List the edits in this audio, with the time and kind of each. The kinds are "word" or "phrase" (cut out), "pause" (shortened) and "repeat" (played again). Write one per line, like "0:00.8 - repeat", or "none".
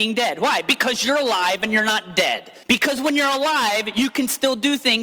0:02.6 - pause